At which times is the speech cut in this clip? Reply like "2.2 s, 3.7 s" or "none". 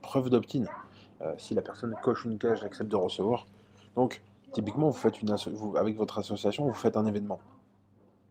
4.4 s